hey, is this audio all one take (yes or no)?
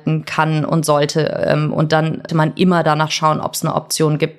no